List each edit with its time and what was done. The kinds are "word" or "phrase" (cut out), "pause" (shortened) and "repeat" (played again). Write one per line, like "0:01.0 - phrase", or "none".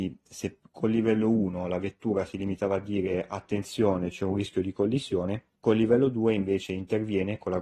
0:05.6 - pause